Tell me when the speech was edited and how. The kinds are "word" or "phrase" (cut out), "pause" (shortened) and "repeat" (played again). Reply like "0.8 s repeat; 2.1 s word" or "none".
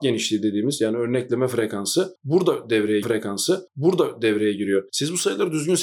3.0 s repeat

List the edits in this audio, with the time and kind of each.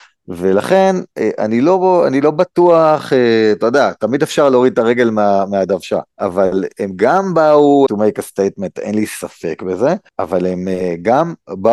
6.1 s pause; 7.9 s word; 10.1 s pause

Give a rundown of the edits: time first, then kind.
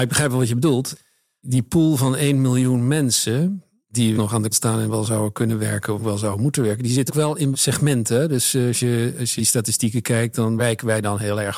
4.1 s word; 4.5 s word; 6.0 s word; 7.1 s word; 7.5 s word; 9.4 s word; 10.6 s word

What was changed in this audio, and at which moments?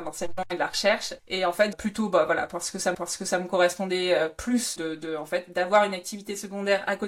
1.2 s pause; 1.7 s phrase; 2.9 s repeat; 4.8 s word

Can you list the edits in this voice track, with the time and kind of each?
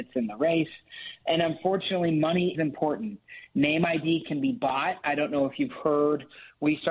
2.5 s word

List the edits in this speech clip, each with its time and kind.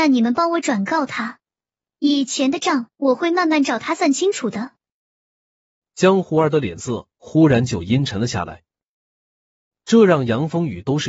2.9 s pause

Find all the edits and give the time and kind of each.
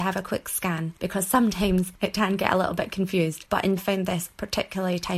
1.0 s pause; 3.8 s phrase

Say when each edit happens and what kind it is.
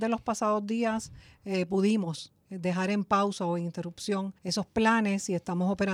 4.4 s pause

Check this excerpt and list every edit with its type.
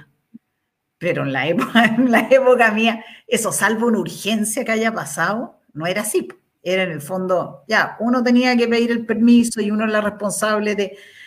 5.7 s pause; 6.5 s pause

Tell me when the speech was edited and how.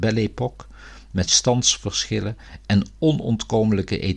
1.3 s word

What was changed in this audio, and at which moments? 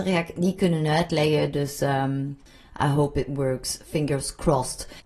none

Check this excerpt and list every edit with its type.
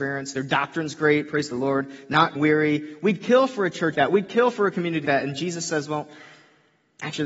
2.3 s word; 3.9 s word; 5.0 s word

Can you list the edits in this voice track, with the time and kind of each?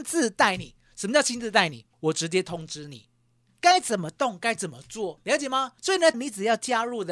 1.9 s pause; 5.8 s pause; 6.1 s phrase

